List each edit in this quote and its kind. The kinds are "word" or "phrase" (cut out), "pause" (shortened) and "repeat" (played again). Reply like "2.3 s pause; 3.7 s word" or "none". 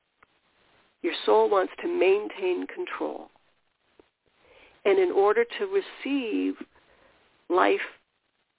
none